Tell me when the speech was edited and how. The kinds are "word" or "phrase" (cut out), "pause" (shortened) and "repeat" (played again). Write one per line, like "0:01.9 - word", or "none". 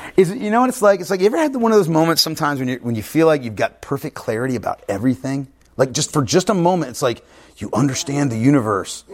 none